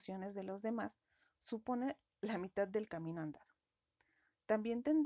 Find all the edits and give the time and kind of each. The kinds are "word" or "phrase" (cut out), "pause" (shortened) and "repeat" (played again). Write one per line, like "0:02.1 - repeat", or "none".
none